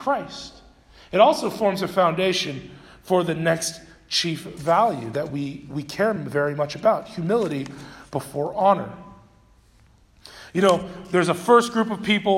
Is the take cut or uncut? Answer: uncut